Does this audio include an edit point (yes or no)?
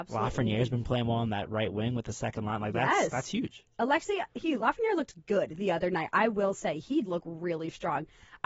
yes